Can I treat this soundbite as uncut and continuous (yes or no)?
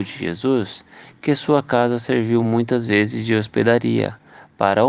yes